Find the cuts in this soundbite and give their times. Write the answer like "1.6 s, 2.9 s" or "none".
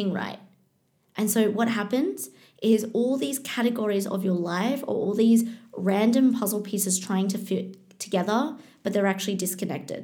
none